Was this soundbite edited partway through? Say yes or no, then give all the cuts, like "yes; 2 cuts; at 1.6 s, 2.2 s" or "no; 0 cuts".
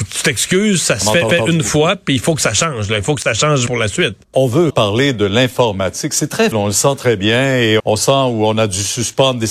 yes; 6 cuts; at 1.3 s, 3.7 s, 4.2 s, 4.7 s, 6.5 s, 7.8 s